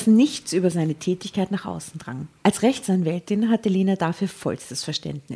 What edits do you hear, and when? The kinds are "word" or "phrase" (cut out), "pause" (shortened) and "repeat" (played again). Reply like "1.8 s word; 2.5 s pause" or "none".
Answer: 2.4 s pause